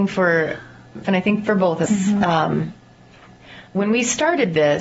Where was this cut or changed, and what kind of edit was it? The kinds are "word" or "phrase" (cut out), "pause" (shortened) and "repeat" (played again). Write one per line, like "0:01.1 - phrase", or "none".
0:01.0 - word
0:01.9 - word
0:03.7 - pause

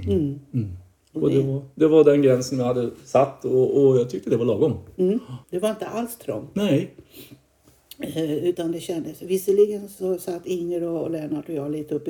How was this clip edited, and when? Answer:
0:05.4 - pause

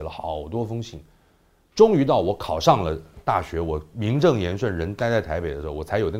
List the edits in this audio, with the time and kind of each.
none

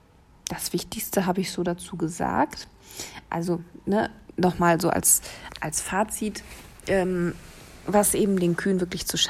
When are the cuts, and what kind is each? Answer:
none

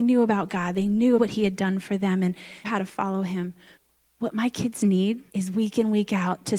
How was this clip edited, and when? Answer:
0:01.2 - phrase
0:02.6 - phrase
0:03.7 - pause
0:05.3 - pause

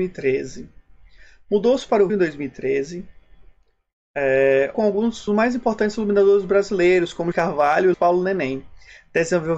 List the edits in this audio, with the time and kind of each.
0:02.1 - word
0:04.7 - phrase
0:05.3 - word
0:07.3 - phrase
0:07.9 - word

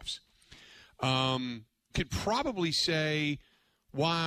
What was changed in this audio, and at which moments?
0:01.9 - word

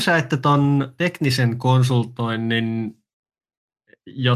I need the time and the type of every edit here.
0:01.0 - word

